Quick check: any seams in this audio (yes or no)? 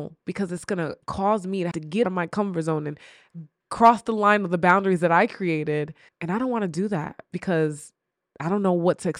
yes